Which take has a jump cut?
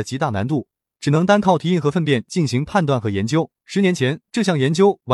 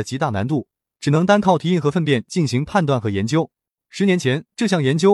first; 1 cut; at 3.6 s

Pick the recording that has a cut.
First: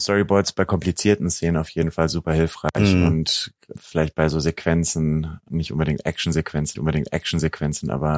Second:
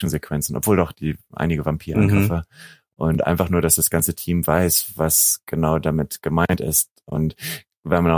first; 3 cuts; at 3.8 s, 5.5 s, 6.8 s

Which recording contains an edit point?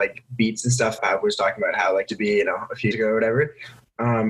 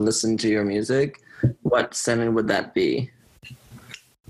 first; 3 cuts; at 1.0 s, 2.1 s, 2.9 s

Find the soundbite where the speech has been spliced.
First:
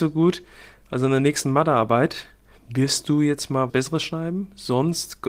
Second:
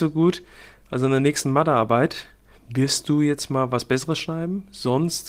first; 1 cut; at 3.7 s

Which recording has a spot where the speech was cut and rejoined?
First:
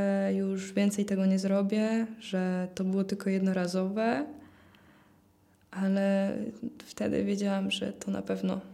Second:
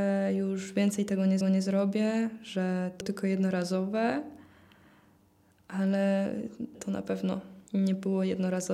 second; 4 cuts; at 1.4 s, 3.0 s, 6.7 s, 7.7 s

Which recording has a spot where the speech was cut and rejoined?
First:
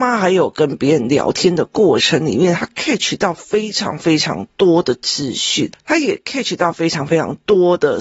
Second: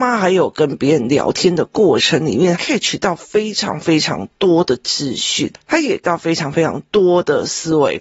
second; 2 cuts; at 2.5 s, 6.0 s

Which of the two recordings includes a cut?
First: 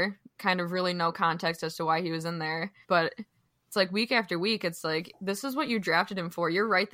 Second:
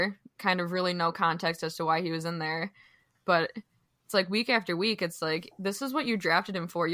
first; 1 cut; at 2.8 s

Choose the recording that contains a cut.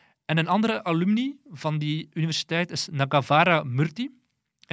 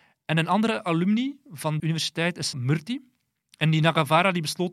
second; 2 cuts; at 1.8 s, 2.5 s

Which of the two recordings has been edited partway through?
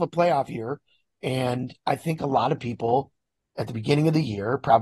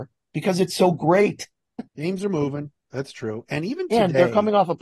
second; 1 cut; at 1.9 s

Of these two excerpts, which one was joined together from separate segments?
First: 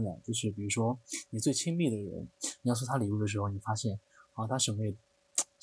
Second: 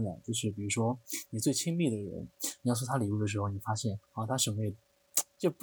second; 1 cut; at 4.0 s

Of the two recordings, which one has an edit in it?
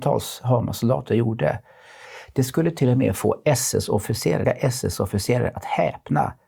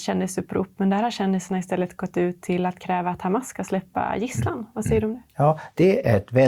first; 1 cut; at 4.4 s

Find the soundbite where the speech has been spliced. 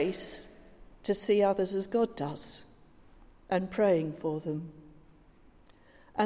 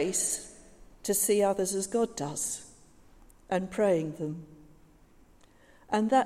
second; 1 cut; at 4.2 s

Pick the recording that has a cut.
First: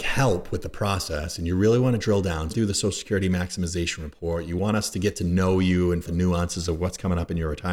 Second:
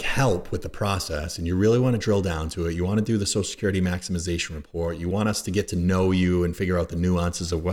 first; 2 cuts; at 2.5 s, 6.0 s

